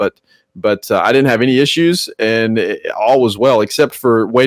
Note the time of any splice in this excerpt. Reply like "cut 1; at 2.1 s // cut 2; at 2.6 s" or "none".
none